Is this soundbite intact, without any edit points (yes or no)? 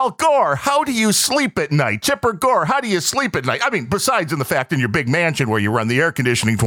yes